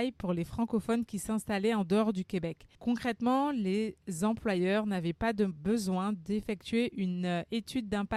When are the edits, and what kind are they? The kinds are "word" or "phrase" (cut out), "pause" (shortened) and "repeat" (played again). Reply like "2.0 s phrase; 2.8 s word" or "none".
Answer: 2.7 s pause